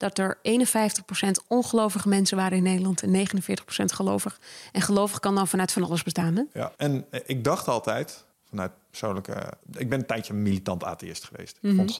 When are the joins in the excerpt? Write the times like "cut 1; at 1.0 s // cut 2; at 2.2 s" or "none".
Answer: cut 1; at 6.7 s // cut 2; at 8.3 s // cut 3; at 9.6 s